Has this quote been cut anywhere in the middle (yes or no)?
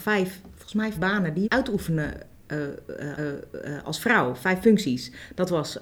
yes